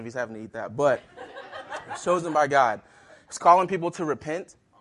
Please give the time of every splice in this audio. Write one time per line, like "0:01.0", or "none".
none